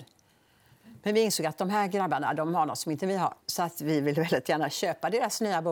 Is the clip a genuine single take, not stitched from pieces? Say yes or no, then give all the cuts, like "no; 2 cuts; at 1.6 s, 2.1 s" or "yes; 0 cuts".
no; 1 cut; at 3.4 s